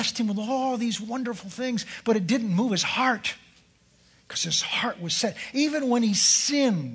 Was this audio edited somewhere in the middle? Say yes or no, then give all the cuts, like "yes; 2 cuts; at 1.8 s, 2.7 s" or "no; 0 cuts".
no; 0 cuts